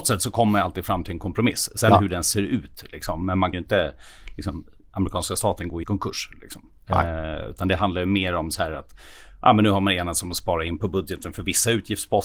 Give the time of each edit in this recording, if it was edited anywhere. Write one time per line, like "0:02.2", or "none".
0:03.5
0:05.8